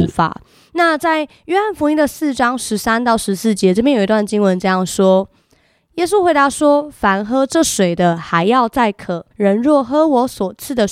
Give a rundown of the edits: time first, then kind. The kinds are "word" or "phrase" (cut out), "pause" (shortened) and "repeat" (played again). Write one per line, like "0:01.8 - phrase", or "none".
0:09.3 - pause